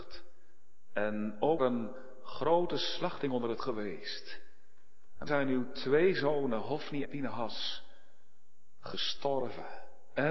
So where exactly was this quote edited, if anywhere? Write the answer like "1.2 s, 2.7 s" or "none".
1.6 s, 3.6 s, 5.3 s, 7.0 s